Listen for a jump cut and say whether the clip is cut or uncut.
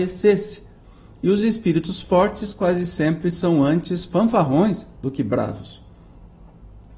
uncut